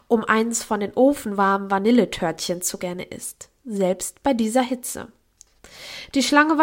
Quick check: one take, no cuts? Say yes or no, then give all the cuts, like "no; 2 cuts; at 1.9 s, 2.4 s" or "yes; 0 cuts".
no; 1 cut; at 2.8 s